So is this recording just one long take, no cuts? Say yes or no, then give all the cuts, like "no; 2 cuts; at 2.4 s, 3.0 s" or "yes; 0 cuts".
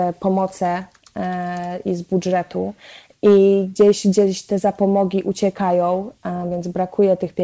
yes; 0 cuts